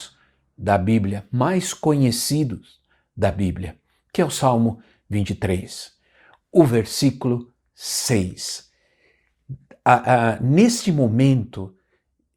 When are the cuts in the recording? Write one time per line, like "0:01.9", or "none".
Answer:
none